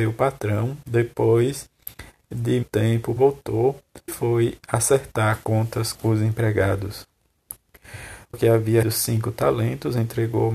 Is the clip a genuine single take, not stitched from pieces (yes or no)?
no